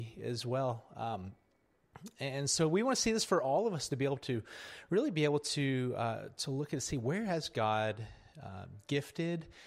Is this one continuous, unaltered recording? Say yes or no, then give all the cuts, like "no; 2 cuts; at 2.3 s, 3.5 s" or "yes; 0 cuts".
yes; 0 cuts